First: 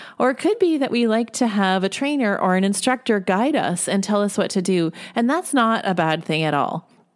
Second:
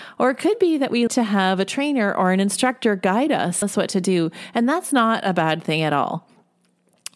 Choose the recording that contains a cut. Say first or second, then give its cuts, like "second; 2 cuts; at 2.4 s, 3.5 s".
second; 2 cuts; at 1.1 s, 3.6 s